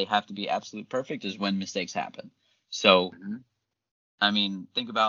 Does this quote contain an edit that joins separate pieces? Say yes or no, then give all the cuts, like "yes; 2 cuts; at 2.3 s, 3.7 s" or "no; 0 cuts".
no; 0 cuts